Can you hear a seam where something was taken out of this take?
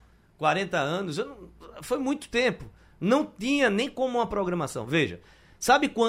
no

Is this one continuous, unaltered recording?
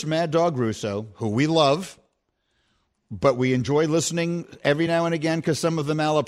yes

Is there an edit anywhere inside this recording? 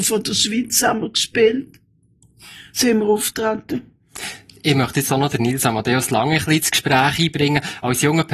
no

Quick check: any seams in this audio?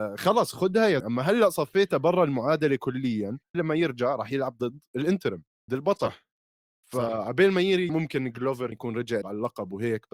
yes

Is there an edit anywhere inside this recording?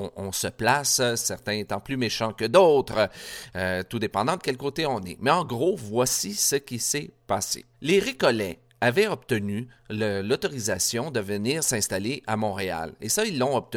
yes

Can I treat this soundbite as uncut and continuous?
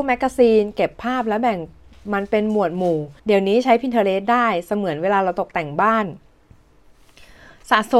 no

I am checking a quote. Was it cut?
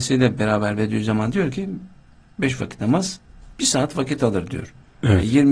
no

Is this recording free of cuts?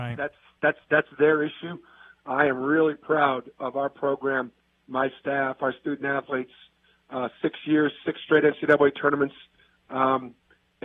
yes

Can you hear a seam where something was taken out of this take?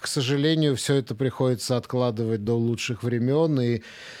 no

